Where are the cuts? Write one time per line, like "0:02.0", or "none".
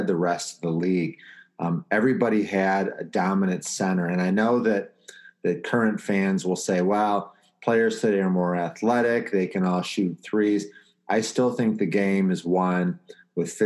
none